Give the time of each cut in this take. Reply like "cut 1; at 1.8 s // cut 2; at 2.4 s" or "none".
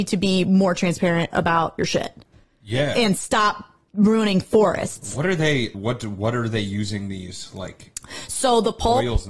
cut 1; at 5.7 s